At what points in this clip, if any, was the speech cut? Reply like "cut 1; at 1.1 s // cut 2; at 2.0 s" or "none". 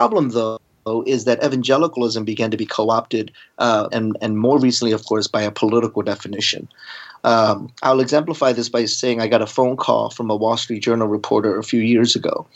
cut 1; at 3.9 s